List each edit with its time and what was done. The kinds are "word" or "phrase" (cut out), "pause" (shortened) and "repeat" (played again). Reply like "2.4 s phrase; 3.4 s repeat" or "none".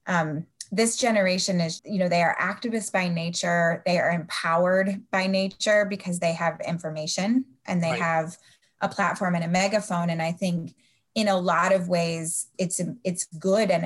1.8 s word; 12.5 s word